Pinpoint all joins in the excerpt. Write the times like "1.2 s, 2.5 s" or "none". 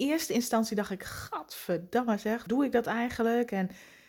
2.5 s